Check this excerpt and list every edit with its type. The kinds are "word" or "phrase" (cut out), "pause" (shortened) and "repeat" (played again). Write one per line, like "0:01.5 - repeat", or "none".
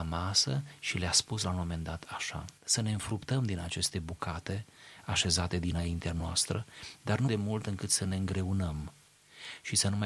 0:07.3 - word